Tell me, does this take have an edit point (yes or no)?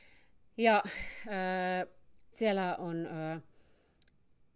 yes